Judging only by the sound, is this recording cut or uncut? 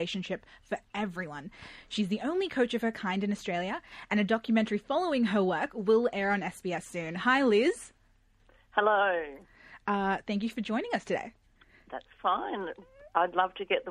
cut